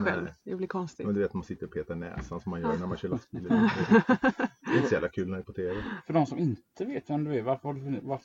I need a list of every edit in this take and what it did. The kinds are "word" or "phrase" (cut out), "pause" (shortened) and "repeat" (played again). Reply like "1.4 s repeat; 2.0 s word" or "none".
5.4 s word